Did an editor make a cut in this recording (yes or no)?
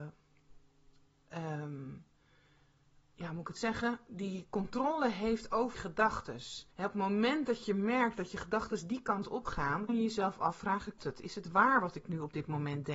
yes